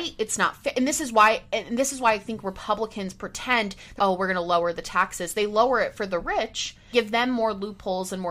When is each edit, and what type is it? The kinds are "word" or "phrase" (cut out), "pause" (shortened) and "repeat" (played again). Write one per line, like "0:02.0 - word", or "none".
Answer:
0:04.0 - word
0:06.9 - word